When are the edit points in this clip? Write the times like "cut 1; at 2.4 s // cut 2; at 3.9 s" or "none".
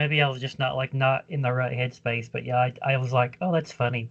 none